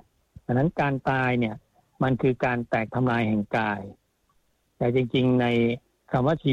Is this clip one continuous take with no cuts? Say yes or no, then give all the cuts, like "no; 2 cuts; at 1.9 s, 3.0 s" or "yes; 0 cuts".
yes; 0 cuts